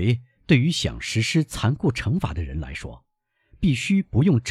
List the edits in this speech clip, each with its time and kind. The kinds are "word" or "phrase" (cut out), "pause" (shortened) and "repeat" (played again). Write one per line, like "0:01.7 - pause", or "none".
none

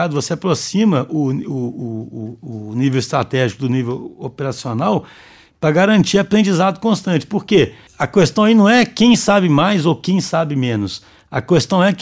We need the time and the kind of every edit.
0:07.9 - pause

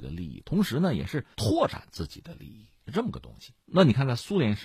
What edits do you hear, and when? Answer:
0:01.3 - pause
0:03.6 - pause

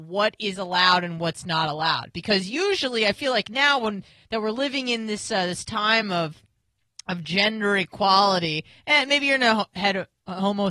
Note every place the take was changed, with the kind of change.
none

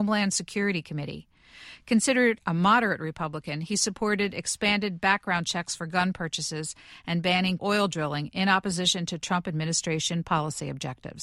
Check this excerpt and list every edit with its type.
0:07.6 - word

